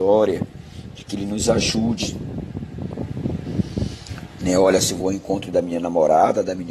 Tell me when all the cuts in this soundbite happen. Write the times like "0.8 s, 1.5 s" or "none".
none